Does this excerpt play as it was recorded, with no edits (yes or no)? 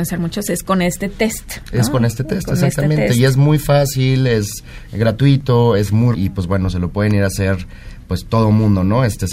no